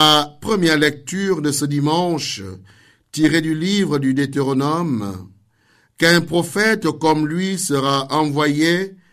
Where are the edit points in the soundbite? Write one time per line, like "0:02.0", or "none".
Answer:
none